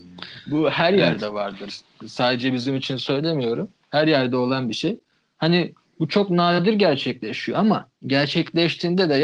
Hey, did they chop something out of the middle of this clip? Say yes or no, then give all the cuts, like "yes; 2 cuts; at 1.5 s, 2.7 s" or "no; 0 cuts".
yes; 1 cut; at 8.0 s